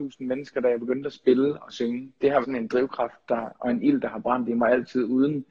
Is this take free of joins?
no; 1 cut; at 2.4 s

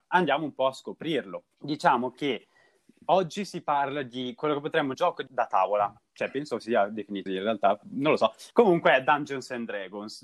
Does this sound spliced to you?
yes; 5 cuts; at 1.5 s, 4.9 s, 5.3 s, 7.3 s, 8.5 s

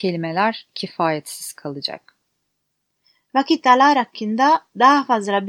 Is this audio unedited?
yes; 0 cuts

